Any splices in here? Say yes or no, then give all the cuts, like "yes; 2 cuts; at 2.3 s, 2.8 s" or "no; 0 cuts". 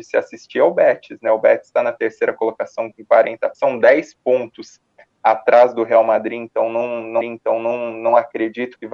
yes; 2 cuts; at 3.5 s, 7.2 s